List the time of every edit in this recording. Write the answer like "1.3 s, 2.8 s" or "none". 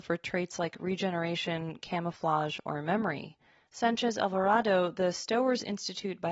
none